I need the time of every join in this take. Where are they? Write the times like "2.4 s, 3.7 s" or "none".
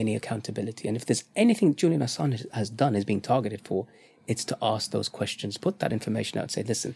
none